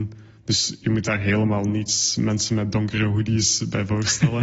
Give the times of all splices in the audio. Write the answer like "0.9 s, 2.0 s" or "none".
none